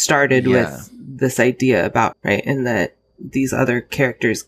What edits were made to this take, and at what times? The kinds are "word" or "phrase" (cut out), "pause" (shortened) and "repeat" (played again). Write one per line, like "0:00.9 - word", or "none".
0:02.1 - word

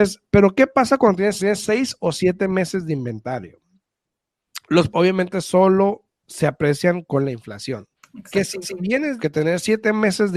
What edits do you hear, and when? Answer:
0:01.4 - repeat
0:04.9 - phrase
0:06.1 - pause
0:08.0 - pause
0:08.6 - repeat
0:09.2 - word

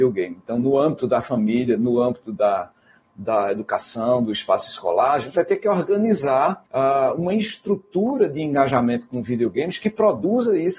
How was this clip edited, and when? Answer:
0:06.7 - pause

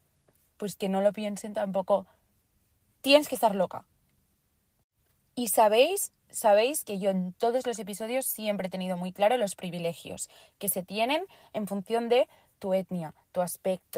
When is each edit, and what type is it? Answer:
none

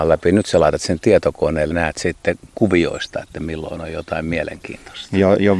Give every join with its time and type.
0:01.7 - word

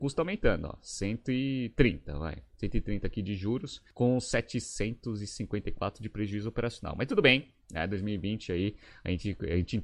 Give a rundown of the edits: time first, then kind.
none

